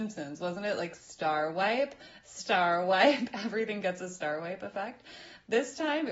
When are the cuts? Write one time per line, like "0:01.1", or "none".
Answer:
none